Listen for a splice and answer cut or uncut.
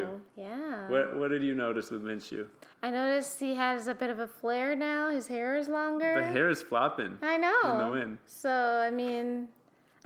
cut